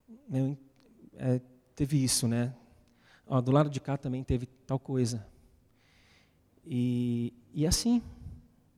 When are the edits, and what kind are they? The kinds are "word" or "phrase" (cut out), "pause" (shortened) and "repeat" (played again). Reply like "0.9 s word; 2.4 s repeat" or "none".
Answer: none